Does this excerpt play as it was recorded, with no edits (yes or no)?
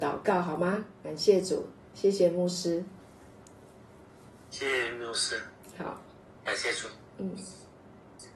yes